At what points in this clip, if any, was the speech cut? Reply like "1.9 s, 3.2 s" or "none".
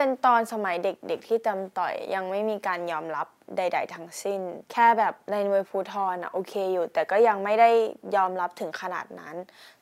4.6 s

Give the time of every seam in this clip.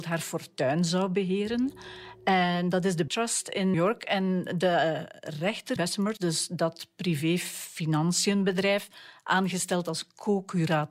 3.1 s, 3.7 s, 5.8 s, 6.2 s

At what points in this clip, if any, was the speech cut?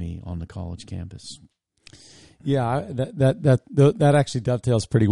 none

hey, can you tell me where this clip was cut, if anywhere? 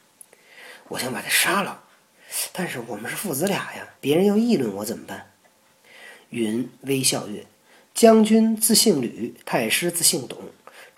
3.9 s, 9.4 s

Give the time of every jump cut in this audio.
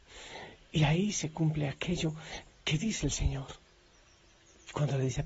2.5 s

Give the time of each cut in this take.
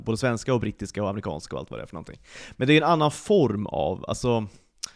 none

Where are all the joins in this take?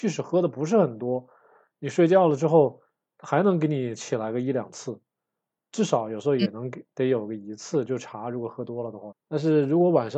9.1 s

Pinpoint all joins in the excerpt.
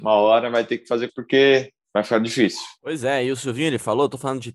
1.1 s

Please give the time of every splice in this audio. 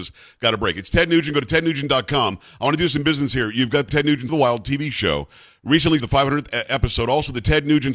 3.9 s, 4.3 s, 6.0 s

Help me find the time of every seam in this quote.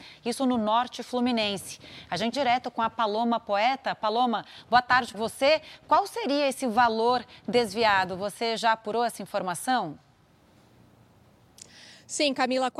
2.3 s, 5.1 s

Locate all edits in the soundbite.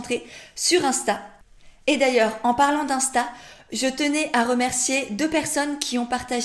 none

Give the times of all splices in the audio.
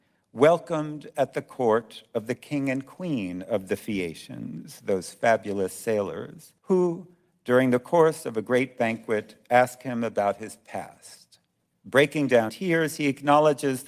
6.6 s, 11.7 s, 12.5 s

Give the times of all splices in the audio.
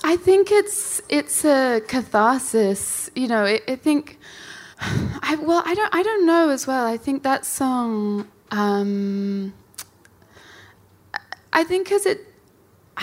4.7 s

